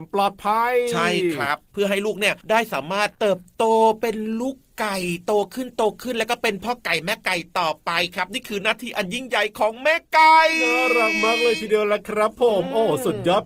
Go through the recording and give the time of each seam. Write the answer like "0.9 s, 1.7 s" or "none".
2.4 s, 3.1 s